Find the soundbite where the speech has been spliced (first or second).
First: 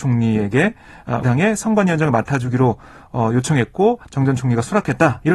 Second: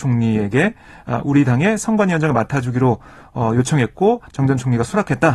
first